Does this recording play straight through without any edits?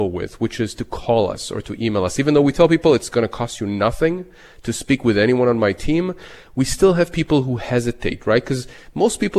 yes; 0 cuts

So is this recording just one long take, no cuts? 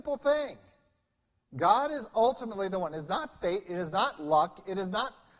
yes; 0 cuts

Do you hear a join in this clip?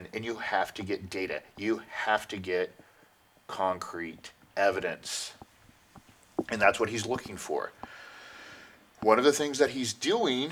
no; 0 cuts

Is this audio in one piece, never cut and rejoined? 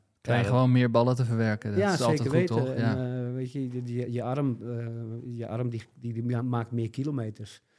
yes; 0 cuts

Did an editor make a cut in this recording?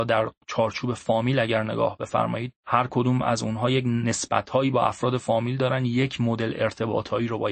yes; 1 cut; at 2.6 s

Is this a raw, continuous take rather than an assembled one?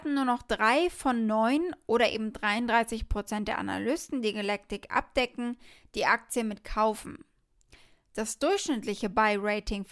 yes; 0 cuts

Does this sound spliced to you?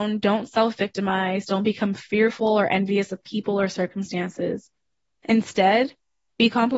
no; 0 cuts

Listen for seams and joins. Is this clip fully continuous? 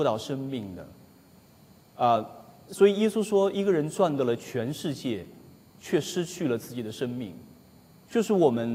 yes; 0 cuts

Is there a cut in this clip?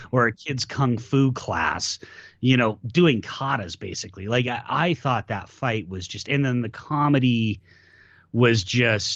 no; 0 cuts

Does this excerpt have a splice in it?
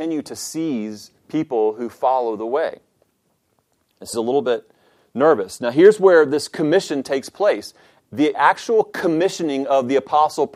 yes; 3 cuts; at 1.2 s, 4.1 s, 8.3 s

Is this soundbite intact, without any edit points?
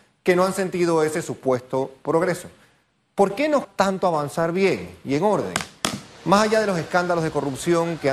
no; 1 cut; at 3.6 s

